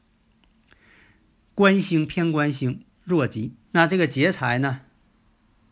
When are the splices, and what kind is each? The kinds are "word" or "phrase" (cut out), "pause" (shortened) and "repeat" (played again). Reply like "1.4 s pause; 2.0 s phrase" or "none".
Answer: 3.6 s pause